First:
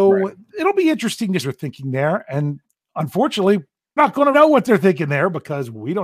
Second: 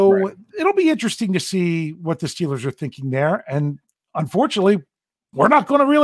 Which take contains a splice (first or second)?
first